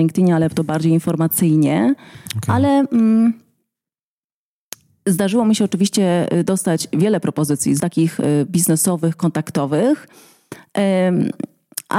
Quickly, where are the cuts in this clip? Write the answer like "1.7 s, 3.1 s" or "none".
7.8 s